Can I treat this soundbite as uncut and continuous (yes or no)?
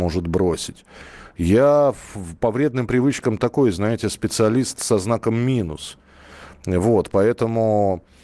yes